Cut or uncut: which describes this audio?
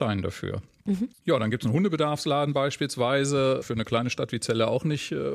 uncut